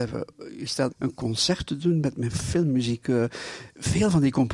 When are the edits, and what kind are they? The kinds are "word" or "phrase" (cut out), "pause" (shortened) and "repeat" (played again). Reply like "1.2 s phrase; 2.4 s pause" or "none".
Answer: 0.9 s phrase